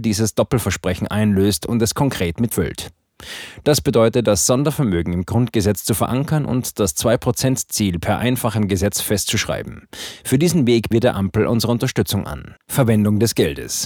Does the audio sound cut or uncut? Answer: cut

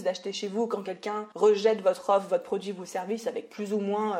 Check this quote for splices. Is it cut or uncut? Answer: cut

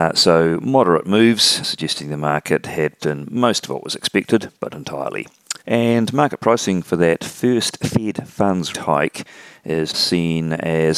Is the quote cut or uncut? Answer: cut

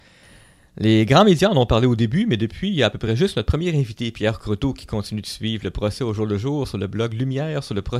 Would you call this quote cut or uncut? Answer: uncut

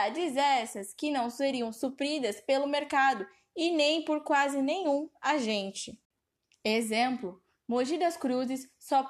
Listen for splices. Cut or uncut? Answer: uncut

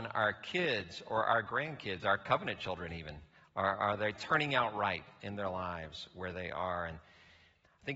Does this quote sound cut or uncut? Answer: uncut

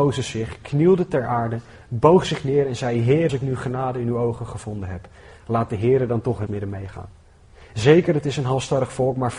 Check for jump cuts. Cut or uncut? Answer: cut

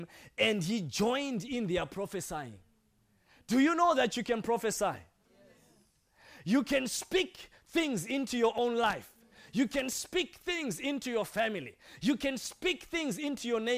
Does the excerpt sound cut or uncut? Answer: uncut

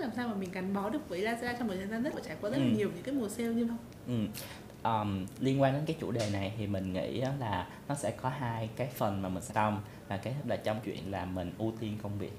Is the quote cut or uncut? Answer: cut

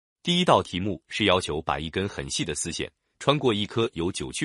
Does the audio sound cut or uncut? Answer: uncut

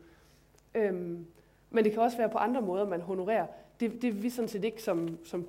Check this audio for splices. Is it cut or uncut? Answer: uncut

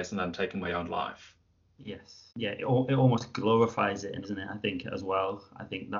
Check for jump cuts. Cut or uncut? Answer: cut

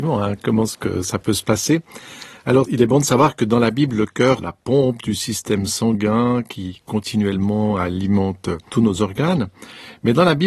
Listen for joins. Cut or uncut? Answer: cut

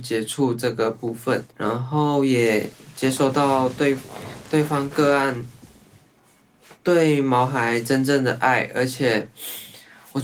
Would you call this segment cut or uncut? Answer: cut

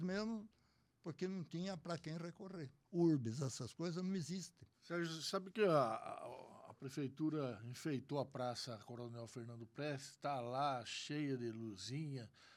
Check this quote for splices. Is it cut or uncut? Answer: cut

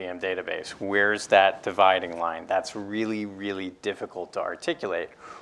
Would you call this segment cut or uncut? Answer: uncut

